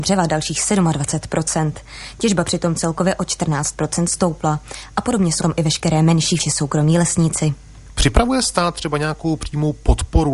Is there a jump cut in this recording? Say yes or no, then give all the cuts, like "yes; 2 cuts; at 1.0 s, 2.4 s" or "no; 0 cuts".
yes; 2 cuts; at 5.4 s, 6.4 s